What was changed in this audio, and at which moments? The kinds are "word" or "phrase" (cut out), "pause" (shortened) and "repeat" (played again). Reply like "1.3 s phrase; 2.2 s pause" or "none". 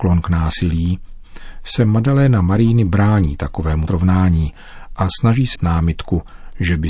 3.9 s word; 5.6 s word